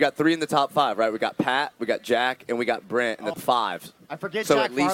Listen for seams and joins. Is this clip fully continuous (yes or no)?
no